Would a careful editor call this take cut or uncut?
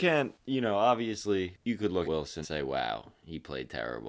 cut